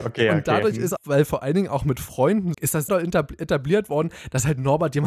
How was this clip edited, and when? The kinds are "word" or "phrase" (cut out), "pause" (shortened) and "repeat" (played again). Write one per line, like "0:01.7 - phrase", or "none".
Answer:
0:01.0 - word
0:02.5 - word
0:02.9 - word